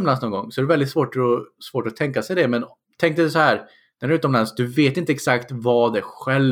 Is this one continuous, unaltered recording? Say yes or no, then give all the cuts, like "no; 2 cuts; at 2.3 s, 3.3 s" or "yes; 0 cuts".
yes; 0 cuts